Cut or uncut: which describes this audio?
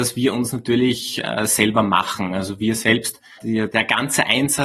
cut